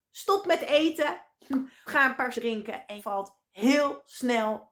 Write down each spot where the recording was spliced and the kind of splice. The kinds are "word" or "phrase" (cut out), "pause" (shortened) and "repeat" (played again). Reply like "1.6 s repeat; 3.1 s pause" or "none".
1.9 s word; 2.3 s word; 3.0 s word